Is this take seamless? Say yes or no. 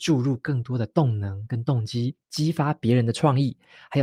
no